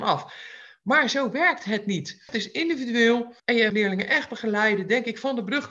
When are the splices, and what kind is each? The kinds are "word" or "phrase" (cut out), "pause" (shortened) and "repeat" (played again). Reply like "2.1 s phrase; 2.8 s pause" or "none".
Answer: 3.4 s pause; 3.7 s word